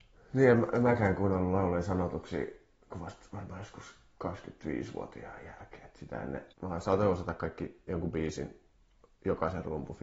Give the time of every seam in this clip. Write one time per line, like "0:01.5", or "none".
0:06.5